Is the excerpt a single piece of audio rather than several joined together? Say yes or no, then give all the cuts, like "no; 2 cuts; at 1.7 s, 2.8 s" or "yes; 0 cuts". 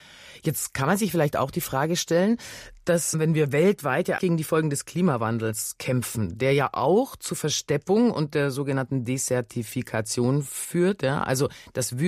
no; 1 cut; at 4.2 s